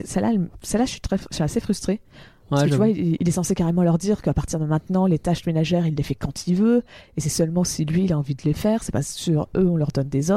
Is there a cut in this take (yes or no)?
no